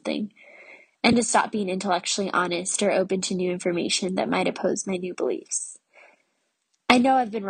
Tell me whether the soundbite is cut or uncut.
uncut